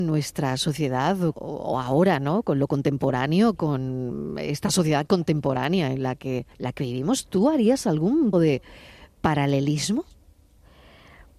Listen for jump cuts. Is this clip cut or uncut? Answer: cut